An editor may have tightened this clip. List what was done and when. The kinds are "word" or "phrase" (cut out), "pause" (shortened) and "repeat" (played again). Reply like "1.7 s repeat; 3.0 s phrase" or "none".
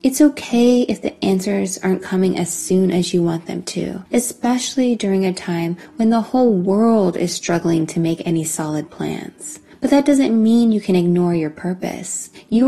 none